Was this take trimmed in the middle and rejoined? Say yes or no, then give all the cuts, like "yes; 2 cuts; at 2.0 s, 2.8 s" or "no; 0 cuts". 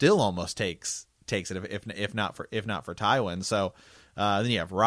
no; 0 cuts